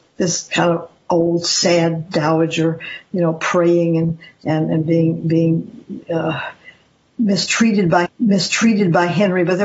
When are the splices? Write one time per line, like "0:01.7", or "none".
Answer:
0:08.1